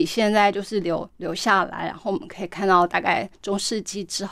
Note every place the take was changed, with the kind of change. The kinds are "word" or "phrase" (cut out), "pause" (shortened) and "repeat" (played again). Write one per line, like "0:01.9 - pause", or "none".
0:03.3 - pause